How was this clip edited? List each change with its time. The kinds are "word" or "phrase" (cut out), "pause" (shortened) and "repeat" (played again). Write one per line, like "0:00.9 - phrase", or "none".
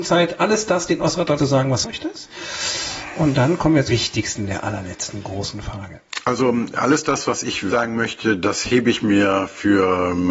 0:01.4 - word
0:01.8 - phrase
0:03.9 - word
0:07.7 - word